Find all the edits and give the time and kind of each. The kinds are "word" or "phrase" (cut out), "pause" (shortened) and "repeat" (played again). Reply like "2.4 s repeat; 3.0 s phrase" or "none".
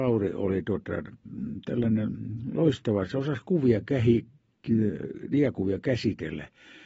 none